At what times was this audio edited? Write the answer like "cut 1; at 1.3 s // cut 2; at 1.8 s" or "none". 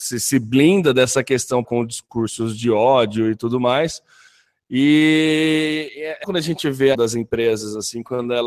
cut 1; at 1.6 s // cut 2; at 6.2 s // cut 3; at 6.9 s